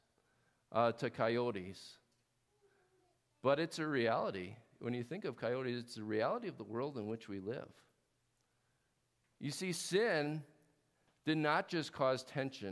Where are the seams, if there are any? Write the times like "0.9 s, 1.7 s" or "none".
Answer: none

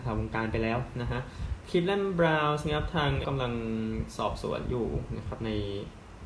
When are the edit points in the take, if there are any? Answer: 3.2 s

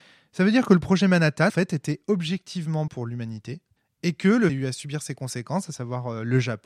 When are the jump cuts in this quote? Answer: 1.5 s, 2.9 s, 3.8 s, 4.5 s

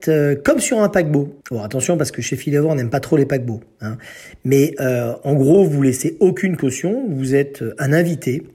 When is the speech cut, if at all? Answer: 1.4 s

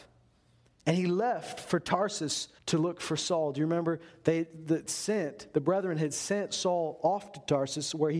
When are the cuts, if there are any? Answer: 2.6 s, 4.9 s

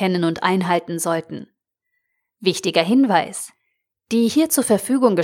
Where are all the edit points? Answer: none

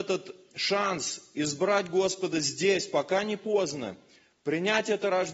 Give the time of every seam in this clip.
none

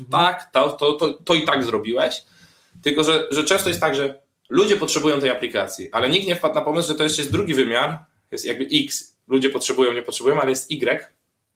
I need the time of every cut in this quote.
3.3 s

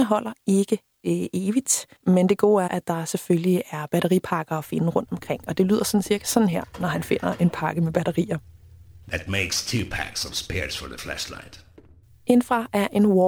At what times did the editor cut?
2.0 s, 2.7 s

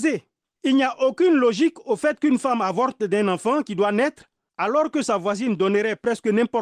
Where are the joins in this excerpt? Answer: none

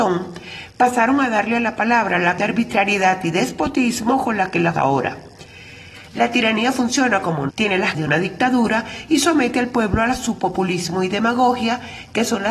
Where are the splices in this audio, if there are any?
2.4 s, 4.7 s, 7.5 s, 7.9 s

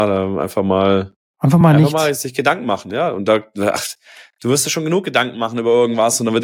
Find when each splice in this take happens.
none

